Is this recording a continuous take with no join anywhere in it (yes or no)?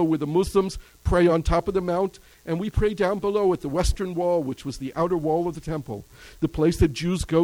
yes